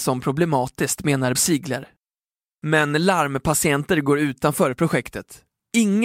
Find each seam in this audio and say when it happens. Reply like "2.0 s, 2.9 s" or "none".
1.4 s